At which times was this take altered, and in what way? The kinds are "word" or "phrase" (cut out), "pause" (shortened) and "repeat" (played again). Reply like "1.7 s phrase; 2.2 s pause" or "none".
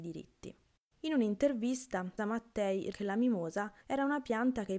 2.2 s word; 2.9 s word; 3.8 s pause